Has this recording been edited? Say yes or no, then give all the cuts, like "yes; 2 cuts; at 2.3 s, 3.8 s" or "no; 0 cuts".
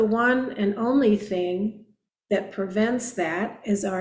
no; 0 cuts